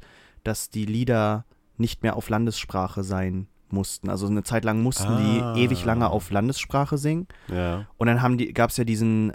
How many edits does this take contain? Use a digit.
0